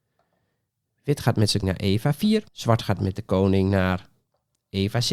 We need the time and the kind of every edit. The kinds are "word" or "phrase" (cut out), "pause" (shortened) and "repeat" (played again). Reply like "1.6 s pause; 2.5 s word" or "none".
1.6 s word; 2.5 s pause